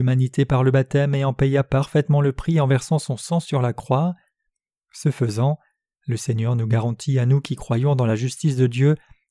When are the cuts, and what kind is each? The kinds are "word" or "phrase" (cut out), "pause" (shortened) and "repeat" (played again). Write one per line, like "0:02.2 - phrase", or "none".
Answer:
none